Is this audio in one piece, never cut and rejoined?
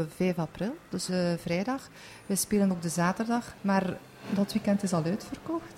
no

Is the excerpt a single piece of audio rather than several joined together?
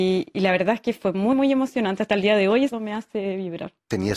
no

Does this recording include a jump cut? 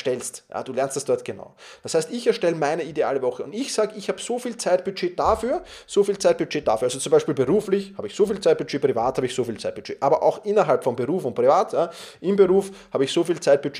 no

